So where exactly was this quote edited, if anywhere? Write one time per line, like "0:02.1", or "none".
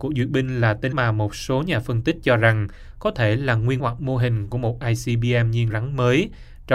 0:00.9
0:03.8
0:05.7